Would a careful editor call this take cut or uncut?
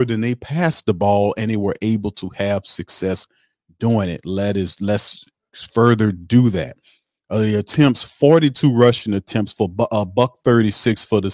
uncut